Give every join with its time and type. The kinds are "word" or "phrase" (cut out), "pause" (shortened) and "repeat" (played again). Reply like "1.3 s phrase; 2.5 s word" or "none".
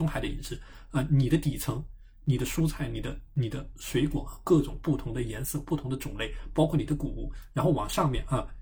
none